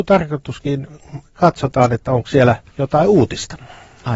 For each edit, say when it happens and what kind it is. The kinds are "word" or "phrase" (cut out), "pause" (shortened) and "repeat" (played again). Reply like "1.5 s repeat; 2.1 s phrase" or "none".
1.3 s pause; 2.7 s pause